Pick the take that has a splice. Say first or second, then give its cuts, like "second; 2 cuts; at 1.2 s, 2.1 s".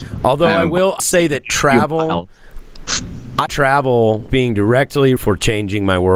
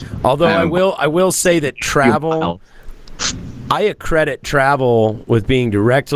first; 4 cuts; at 1.0 s, 3.5 s, 4.3 s, 5.2 s